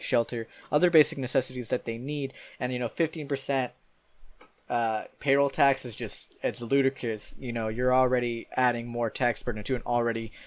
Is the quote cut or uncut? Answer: cut